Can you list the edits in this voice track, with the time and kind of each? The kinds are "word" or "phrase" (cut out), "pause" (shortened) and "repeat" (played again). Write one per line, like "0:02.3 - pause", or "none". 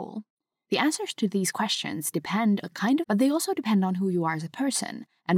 0:02.6 - word
0:03.0 - phrase

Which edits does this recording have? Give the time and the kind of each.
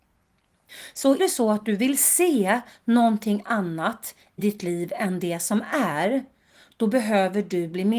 0:01.2 - word
0:04.4 - word

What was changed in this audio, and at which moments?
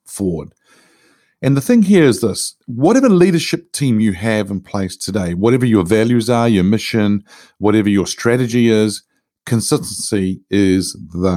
none

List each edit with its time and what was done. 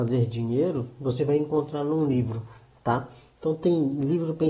none

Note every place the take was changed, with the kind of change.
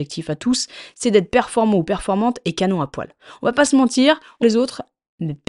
0:04.4 - phrase

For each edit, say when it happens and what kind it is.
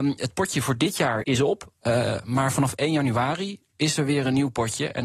0:01.2 - word
0:03.7 - pause

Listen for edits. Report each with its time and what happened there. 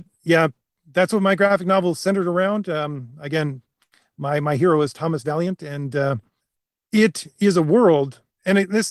0:06.4 - pause

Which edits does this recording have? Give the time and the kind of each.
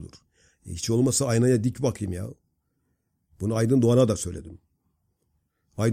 none

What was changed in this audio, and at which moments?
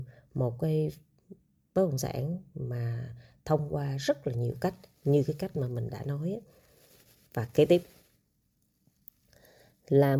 none

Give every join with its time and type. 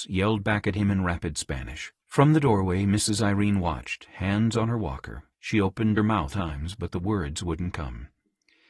0:02.0 - pause
0:05.3 - pause
0:06.0 - phrase
0:06.3 - word

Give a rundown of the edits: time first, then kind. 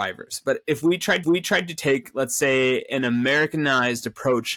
0:01.2 - repeat

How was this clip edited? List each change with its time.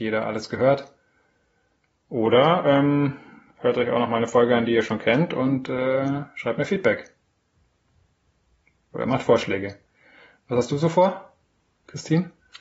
none

